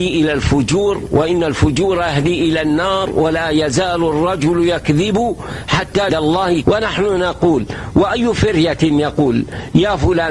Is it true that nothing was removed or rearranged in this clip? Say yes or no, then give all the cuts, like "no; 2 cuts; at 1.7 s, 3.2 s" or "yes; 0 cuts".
no; 2 cuts; at 6.1 s, 6.6 s